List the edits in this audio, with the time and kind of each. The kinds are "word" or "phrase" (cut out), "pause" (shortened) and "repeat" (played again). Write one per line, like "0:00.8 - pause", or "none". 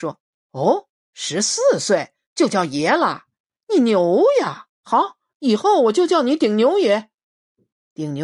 0:04.7 - pause

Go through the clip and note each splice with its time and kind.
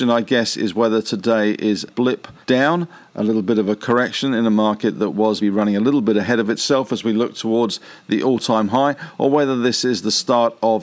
0:01.9 - word
0:02.4 - pause
0:05.4 - word

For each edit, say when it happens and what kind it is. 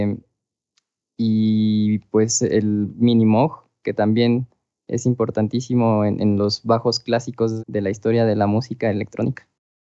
0:07.6 - word

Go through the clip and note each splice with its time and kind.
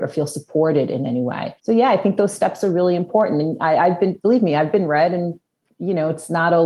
0:01.6 - pause

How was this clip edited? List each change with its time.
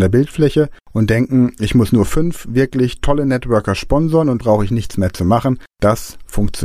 0:04.4 - word

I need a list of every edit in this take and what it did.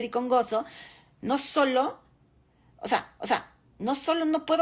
0:03.2 - repeat

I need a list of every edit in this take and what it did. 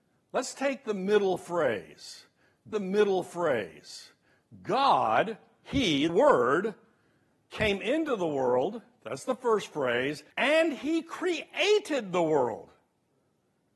0:02.7 - repeat
0:06.1 - word
0:10.3 - pause

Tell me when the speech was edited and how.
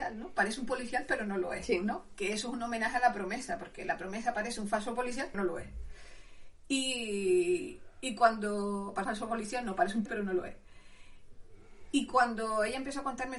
0:05.3 - word
0:09.0 - word
0:10.1 - word

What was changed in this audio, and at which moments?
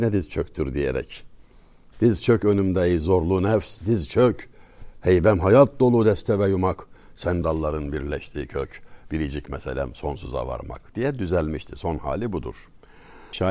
0:07.4 - word

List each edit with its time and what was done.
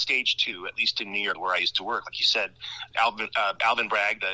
0:01.3 - word
0:02.9 - word

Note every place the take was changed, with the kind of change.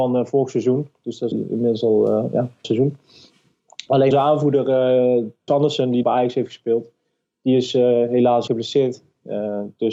0:01.3 - word
0:02.6 - word
0:04.1 - word
0:05.5 - word
0:06.0 - word
0:08.5 - word

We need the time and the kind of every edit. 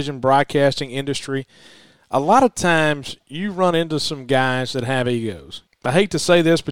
none

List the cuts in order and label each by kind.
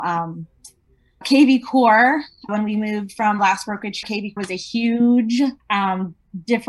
0:01.2 - word
0:02.5 - word
0:03.4 - word
0:04.0 - word
0:04.4 - word
0:05.6 - pause

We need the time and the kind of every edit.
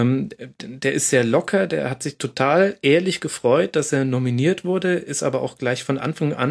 none

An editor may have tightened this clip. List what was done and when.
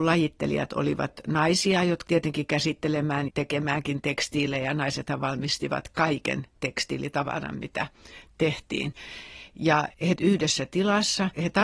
0:02.1 - phrase
0:03.3 - word
0:10.2 - word

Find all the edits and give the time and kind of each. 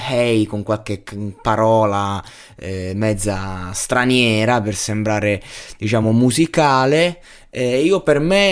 none

